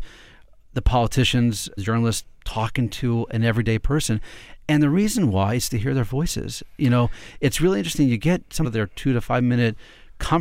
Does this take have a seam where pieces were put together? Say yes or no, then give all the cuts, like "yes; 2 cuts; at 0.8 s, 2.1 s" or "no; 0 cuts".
yes; 2 cuts; at 1.8 s, 8.6 s